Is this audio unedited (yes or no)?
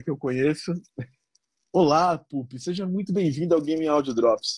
yes